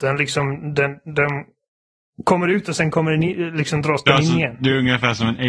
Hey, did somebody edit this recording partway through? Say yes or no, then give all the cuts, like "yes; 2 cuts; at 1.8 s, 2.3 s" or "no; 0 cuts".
no; 0 cuts